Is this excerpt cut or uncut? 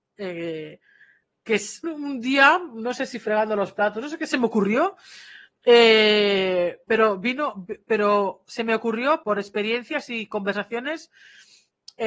cut